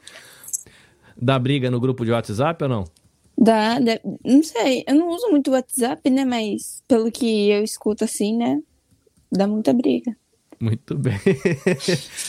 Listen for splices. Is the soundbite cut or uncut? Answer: uncut